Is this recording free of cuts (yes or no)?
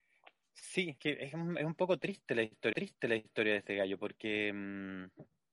no